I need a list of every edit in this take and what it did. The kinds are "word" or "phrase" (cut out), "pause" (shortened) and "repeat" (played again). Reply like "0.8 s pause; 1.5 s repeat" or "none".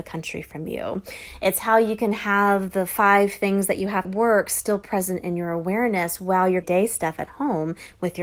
4.0 s phrase; 6.6 s phrase